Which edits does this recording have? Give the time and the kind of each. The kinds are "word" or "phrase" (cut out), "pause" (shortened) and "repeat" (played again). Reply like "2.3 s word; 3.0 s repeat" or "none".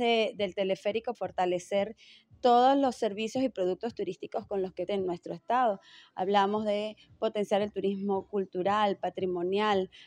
1.1 s word; 4.9 s phrase